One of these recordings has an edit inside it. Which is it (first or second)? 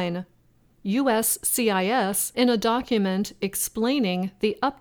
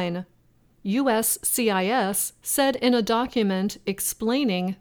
first